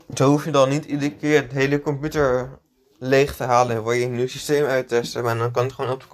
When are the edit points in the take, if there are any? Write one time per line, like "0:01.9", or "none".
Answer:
none